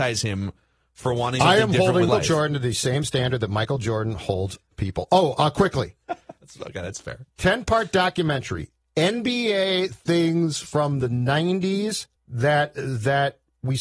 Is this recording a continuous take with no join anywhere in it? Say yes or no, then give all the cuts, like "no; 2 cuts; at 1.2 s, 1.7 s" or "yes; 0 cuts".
no; 4 cuts; at 1.4 s, 2.1 s, 4.7 s, 12.2 s